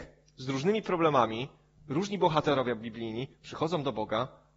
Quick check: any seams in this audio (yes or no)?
no